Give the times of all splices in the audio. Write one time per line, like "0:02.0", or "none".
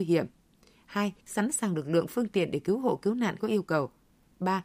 0:01.2
0:03.4